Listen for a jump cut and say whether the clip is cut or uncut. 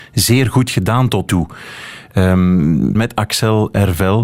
cut